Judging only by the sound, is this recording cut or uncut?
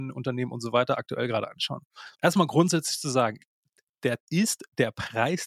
cut